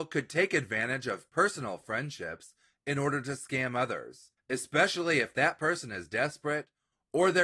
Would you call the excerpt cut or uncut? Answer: cut